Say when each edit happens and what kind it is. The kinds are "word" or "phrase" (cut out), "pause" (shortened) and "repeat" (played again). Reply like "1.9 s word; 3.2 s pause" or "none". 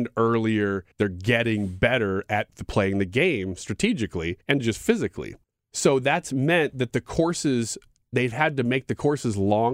0.9 s pause; 4.4 s pause; 5.4 s pause